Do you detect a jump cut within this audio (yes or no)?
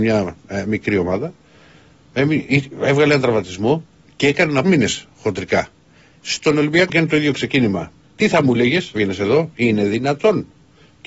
yes